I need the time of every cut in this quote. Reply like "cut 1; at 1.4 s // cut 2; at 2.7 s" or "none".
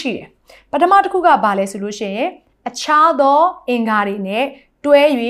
none